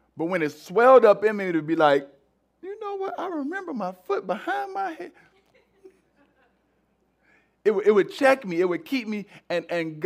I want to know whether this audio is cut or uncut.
uncut